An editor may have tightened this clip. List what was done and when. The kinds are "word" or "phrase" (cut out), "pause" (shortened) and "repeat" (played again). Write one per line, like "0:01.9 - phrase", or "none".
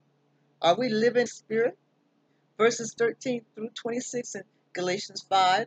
0:01.3 - phrase
0:02.3 - pause